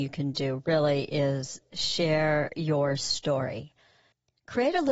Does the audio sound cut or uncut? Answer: uncut